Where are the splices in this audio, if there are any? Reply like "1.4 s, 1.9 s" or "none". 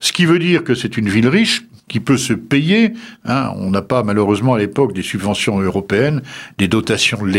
none